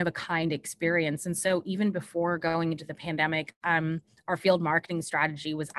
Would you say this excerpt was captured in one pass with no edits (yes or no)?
yes